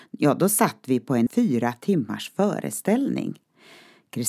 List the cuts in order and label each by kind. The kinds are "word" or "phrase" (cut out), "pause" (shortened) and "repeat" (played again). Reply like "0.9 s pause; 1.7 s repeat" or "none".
1.3 s word